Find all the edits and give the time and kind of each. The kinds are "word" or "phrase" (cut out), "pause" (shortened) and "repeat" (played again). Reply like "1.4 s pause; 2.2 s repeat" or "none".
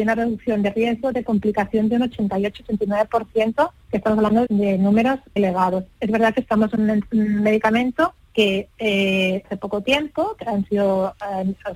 3.8 s pause; 4.5 s word; 5.4 s word; 8.2 s pause; 9.4 s phrase